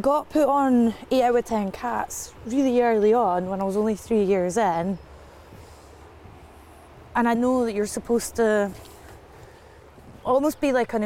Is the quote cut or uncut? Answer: cut